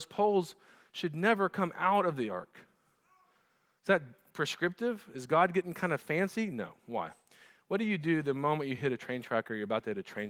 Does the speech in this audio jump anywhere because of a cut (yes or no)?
no